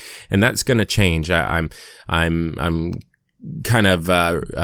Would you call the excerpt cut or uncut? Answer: uncut